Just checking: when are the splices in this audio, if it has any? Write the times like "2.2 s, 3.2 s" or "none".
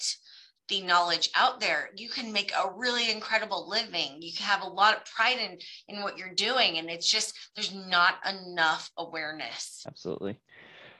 none